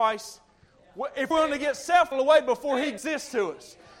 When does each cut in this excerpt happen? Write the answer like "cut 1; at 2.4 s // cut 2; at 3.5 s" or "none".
cut 1; at 1.3 s // cut 2; at 2.1 s // cut 3; at 3.0 s